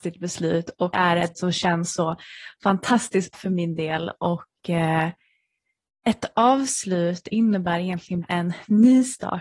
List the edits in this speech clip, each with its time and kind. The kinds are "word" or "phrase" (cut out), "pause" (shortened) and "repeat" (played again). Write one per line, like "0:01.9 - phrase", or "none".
0:00.9 - word
0:01.3 - word
0:03.3 - word
0:08.2 - word